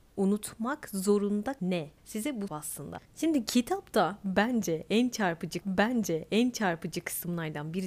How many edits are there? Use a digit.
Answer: 5